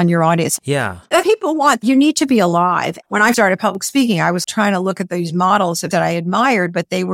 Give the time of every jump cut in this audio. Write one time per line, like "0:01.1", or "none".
0:01.2
0:03.3
0:04.4
0:05.9